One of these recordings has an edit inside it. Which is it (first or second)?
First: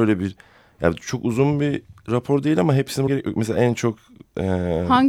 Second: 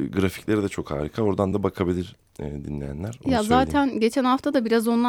first